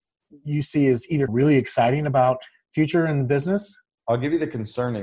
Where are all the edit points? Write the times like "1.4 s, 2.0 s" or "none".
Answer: 1.3 s